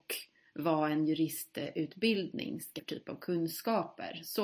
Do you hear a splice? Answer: yes; 1 cut; at 2.8 s

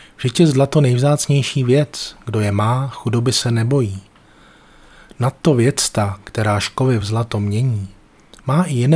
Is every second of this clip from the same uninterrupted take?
yes; 0 cuts

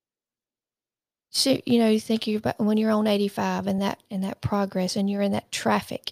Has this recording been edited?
no; 0 cuts

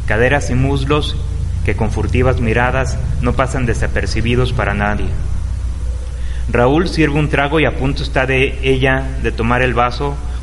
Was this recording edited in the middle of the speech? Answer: no; 0 cuts

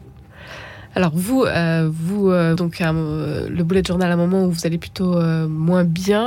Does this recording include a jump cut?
yes; 1 cut; at 2.6 s

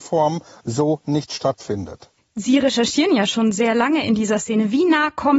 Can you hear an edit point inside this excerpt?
yes; 1 cut; at 2.2 s

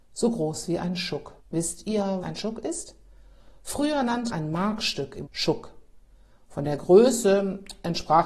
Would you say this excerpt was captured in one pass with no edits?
no; 4 cuts; at 1.4 s, 2.2 s, 4.3 s, 5.2 s

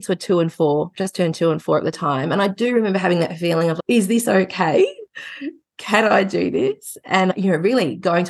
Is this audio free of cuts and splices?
yes; 0 cuts

